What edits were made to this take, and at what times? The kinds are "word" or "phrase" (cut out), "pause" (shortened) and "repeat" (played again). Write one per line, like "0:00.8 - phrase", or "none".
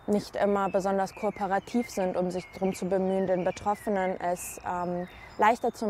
none